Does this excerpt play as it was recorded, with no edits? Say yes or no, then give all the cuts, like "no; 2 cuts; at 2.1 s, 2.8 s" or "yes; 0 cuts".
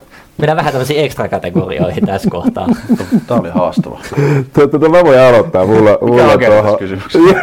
yes; 0 cuts